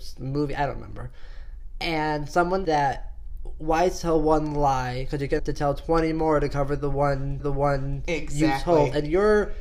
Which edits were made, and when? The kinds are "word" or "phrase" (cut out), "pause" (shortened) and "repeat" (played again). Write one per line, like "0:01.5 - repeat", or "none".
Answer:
0:02.6 - word
0:05.4 - phrase
0:07.4 - repeat